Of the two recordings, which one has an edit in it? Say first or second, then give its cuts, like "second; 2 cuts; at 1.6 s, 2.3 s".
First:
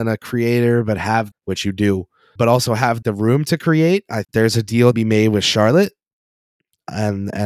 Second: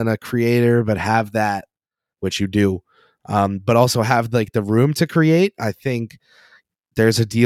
first; 5 cuts; at 1.3 s, 2.4 s, 3.0 s, 4.2 s, 4.9 s